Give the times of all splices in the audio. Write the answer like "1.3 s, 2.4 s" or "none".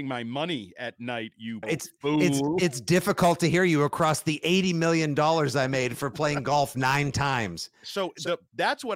1.6 s